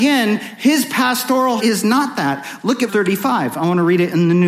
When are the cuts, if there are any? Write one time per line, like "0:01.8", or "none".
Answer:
0:01.6
0:02.9